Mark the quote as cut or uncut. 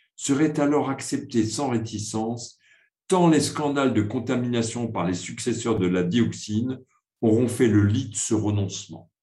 uncut